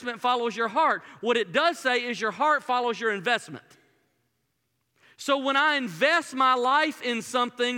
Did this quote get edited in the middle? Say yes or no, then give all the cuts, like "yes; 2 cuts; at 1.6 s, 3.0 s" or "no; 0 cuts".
no; 0 cuts